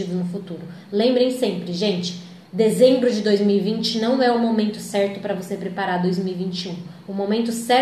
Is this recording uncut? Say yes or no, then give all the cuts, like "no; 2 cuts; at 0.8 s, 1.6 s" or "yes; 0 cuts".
no; 1 cut; at 2.5 s